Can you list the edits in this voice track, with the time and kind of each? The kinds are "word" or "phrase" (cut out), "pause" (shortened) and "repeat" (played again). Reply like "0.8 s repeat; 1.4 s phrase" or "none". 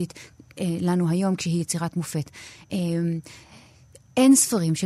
none

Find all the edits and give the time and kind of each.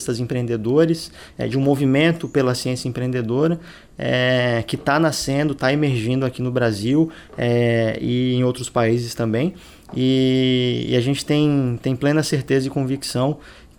none

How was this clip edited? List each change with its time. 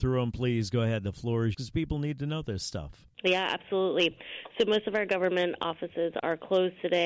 1.5 s word; 3.1 s pause

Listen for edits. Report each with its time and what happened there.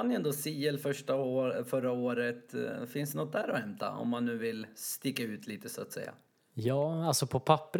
6.3 s pause

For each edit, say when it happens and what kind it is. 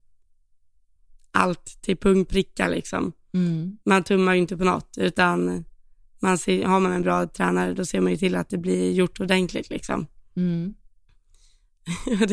2.3 s word

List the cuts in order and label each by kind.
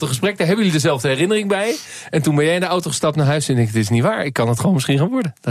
none

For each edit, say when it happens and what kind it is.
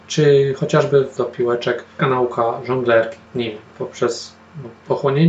1.2 s word; 2.0 s word; 3.3 s pause

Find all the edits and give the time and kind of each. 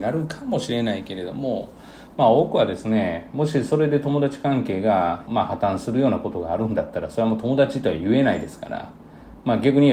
5.3 s phrase

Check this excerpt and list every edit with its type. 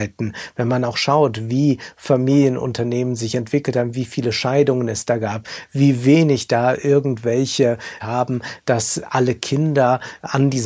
8.0 s phrase

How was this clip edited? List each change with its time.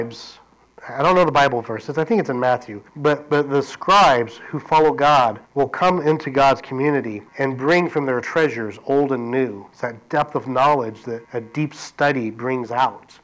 2.9 s pause; 5.4 s pause; 7.3 s pause; 9.7 s pause; 11.2 s pause

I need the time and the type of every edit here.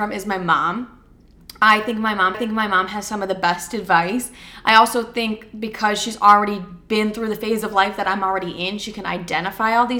2.3 s repeat

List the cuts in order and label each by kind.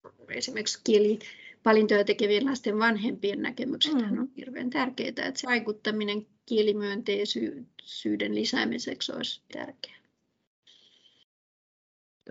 5.4 s word; 9.5 s word

